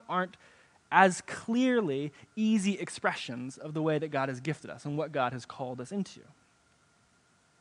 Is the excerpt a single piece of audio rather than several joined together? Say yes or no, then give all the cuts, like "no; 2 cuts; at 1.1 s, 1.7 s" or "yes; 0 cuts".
yes; 0 cuts